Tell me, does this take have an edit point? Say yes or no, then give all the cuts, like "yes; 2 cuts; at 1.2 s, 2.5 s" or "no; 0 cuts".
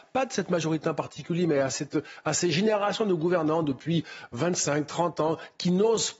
no; 0 cuts